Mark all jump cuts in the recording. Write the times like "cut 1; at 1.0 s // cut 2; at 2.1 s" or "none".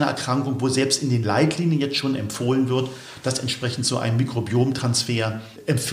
none